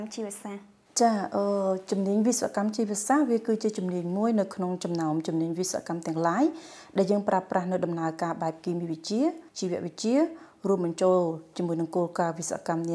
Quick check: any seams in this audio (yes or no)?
yes